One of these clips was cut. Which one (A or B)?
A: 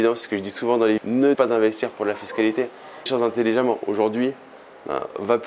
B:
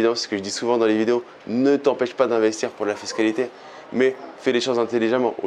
A